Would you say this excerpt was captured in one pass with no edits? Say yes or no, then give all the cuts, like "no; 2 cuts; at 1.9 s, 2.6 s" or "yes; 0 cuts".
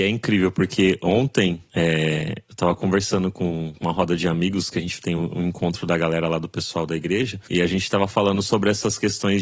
yes; 0 cuts